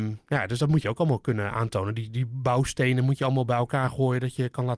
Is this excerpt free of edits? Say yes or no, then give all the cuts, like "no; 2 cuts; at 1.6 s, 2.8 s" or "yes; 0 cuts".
yes; 0 cuts